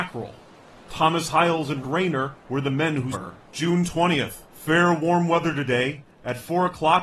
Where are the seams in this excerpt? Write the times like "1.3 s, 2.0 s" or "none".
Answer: 1.8 s, 2.4 s, 3.1 s, 3.4 s, 4.4 s